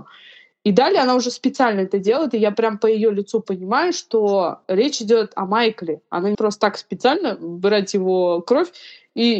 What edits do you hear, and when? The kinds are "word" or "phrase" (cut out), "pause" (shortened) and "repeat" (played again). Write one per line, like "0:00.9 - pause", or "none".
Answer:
0:06.3 - word